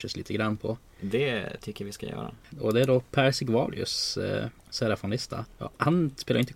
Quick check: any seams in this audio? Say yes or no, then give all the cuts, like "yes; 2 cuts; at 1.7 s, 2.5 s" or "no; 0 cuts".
no; 0 cuts